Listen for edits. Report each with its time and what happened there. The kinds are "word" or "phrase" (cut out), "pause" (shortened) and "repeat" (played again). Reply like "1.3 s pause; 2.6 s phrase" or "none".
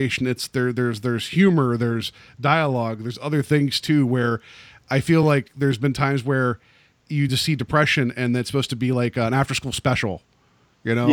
none